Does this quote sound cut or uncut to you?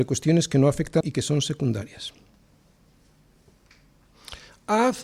cut